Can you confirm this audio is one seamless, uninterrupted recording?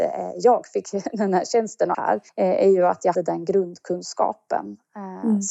no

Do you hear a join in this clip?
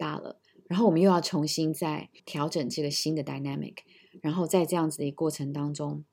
yes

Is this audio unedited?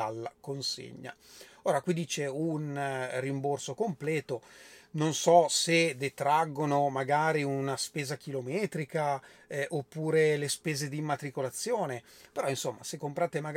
yes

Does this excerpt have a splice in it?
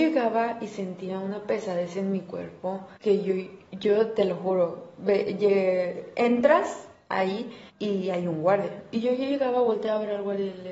yes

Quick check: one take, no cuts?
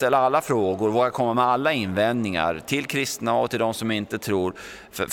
yes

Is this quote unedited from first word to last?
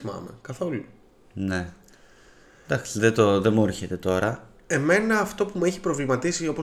yes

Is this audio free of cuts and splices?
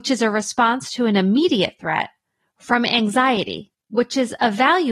yes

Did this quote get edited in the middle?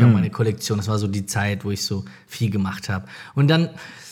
no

